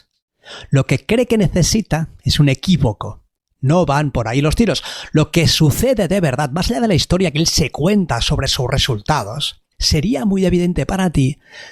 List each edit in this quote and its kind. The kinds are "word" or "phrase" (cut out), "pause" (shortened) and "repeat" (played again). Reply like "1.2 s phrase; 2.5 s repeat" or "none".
9.7 s pause